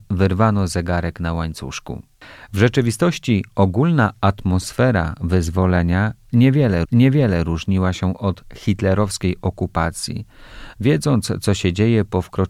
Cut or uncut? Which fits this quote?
cut